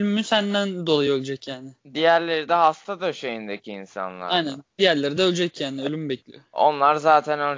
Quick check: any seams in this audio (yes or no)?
no